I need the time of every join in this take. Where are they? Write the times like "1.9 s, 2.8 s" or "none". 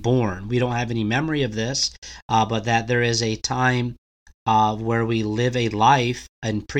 none